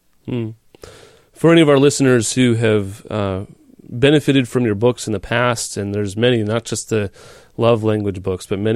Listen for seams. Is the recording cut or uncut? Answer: uncut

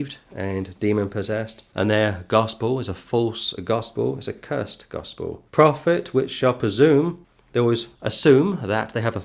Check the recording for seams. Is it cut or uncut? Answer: cut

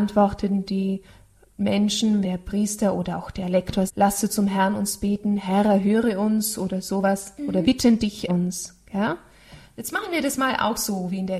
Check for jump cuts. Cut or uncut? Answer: cut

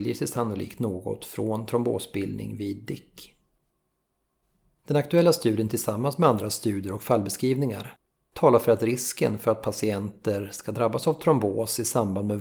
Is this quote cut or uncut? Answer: uncut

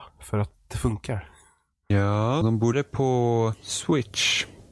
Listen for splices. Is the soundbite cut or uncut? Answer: cut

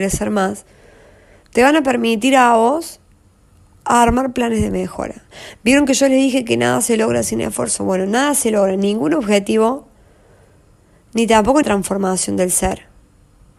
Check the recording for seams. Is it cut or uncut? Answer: cut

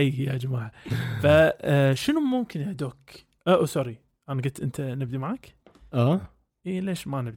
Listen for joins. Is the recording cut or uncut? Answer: uncut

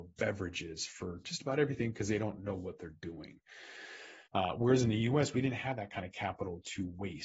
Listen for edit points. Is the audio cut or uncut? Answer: cut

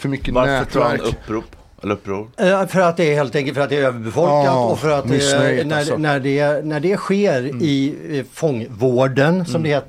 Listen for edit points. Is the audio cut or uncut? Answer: uncut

